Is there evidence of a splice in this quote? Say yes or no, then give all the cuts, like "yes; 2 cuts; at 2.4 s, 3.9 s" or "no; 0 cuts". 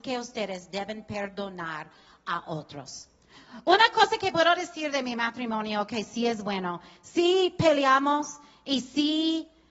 no; 0 cuts